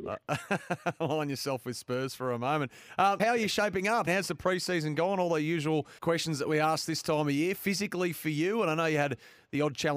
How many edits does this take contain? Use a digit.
3